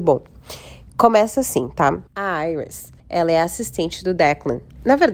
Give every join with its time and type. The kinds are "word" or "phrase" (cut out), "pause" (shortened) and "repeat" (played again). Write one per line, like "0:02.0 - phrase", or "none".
0:02.1 - pause
0:03.0 - pause